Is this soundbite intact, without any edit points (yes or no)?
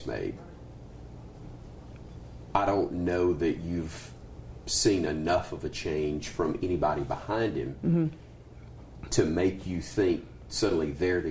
yes